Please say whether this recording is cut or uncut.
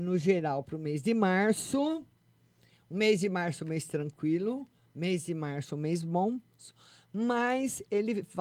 uncut